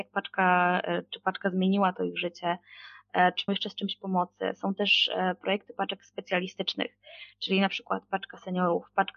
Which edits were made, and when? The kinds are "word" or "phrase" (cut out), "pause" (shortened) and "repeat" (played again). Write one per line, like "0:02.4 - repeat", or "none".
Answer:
0:03.5 - word